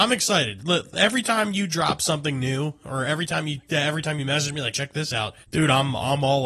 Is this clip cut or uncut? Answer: cut